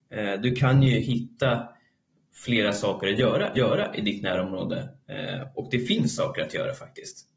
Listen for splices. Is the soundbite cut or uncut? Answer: cut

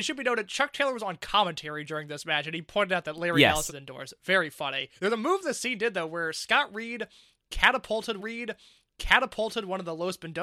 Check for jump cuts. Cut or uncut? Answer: cut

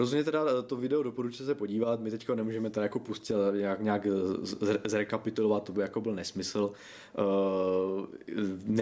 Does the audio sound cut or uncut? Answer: uncut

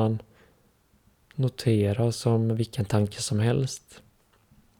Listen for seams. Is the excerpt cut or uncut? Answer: uncut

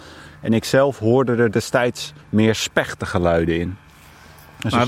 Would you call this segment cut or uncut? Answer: cut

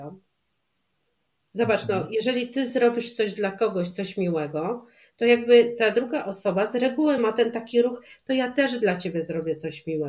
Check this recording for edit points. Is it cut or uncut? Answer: uncut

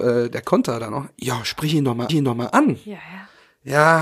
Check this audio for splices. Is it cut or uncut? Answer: cut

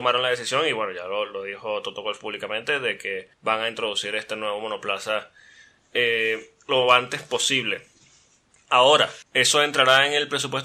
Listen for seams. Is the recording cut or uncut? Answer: cut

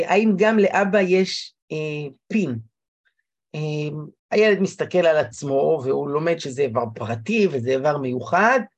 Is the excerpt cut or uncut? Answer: cut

